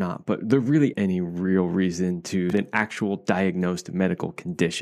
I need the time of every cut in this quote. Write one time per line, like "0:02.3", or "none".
0:00.9
0:02.5

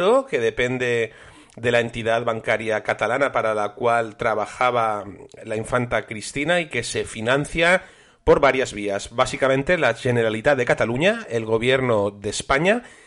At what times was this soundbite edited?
none

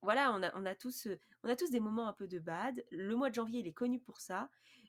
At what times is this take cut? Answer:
none

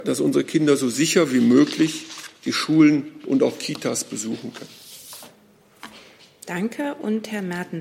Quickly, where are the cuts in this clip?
none

